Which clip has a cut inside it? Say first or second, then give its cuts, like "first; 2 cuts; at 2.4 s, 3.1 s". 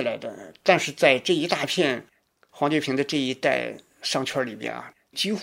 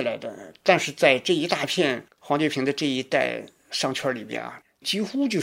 second; 1 cut; at 2.1 s